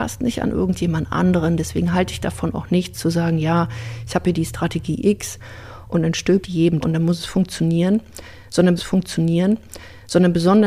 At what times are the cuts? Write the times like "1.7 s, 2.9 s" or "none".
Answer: 6.4 s, 6.8 s, 8.8 s